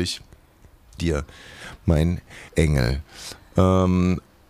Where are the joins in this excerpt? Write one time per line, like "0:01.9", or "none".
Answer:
0:01.0
0:02.5